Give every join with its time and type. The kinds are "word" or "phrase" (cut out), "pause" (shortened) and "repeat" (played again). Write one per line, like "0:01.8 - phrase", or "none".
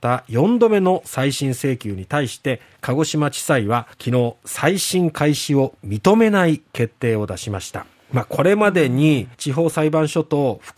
0:03.9 - pause
0:07.9 - pause
0:09.3 - pause